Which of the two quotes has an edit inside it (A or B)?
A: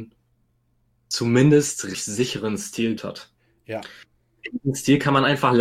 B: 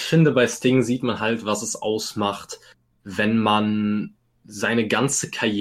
A